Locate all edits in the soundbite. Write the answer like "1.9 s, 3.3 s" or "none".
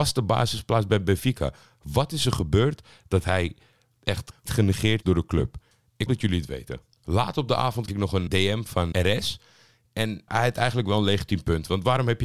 4.5 s, 5.0 s, 6.1 s, 7.9 s, 8.3 s, 8.9 s, 10.3 s